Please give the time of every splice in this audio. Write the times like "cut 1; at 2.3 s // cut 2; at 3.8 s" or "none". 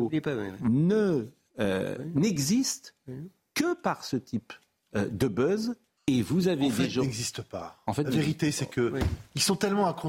cut 1; at 6.0 s

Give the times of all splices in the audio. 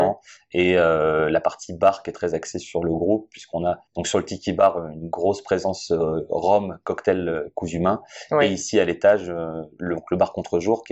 cut 1; at 3.9 s

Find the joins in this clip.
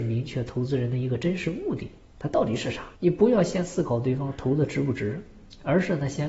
cut 1; at 3.0 s

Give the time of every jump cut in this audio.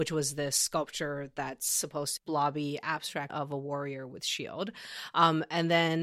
cut 1; at 2.2 s // cut 2; at 3.3 s

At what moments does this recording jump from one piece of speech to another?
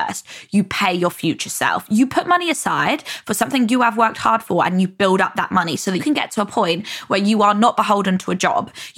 cut 1; at 6.0 s

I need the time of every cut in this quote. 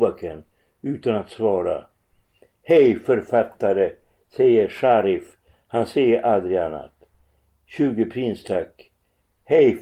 none

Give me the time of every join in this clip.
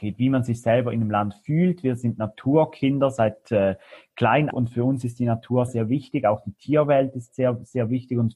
cut 1; at 4.5 s // cut 2; at 5.7 s

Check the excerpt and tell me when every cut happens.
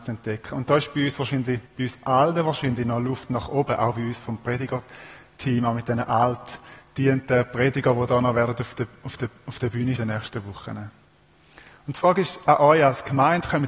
cut 1; at 1.7 s // cut 2; at 9.2 s // cut 3; at 10.0 s

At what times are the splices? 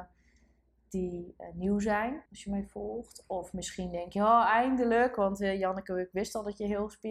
cut 1; at 2.3 s

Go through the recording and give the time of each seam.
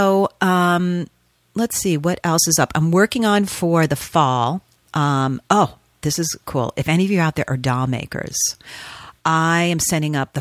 none

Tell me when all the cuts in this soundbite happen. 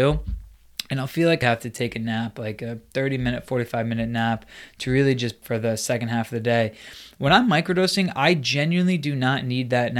cut 1; at 1.4 s // cut 2; at 5.4 s

